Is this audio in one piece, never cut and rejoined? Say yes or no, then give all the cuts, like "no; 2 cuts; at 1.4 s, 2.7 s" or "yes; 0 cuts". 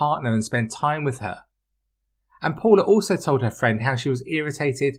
yes; 0 cuts